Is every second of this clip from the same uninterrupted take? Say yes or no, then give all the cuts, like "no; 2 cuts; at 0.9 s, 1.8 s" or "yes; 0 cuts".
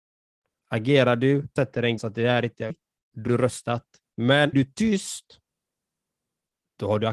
no; 5 cuts; at 1.6 s, 2.0 s, 2.7 s, 3.3 s, 4.5 s